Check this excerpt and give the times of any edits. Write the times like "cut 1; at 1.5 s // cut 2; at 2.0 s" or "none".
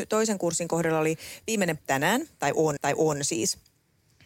cut 1; at 1.8 s // cut 2; at 2.8 s